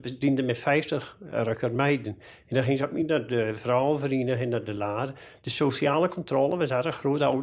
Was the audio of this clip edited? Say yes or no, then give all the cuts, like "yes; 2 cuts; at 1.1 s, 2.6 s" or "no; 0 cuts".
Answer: no; 0 cuts